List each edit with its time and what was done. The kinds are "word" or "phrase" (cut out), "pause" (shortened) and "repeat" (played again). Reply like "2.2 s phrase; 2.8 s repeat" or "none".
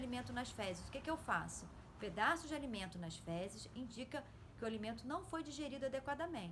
none